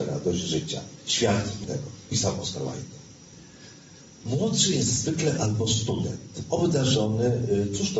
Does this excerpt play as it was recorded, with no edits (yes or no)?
no